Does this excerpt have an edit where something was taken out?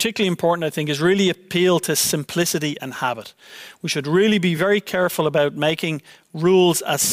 no; 0 cuts

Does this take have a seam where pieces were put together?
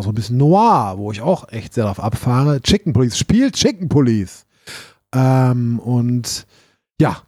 no; 0 cuts

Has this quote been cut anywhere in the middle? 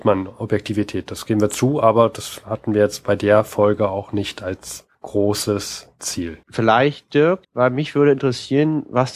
yes; 3 cuts; at 4.9 s, 6.4 s, 7.4 s

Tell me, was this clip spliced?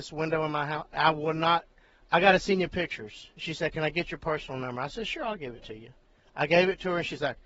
no; 0 cuts

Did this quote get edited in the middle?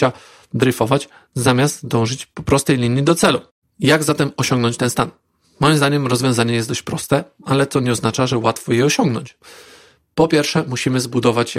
yes; 1 cut; at 3.5 s

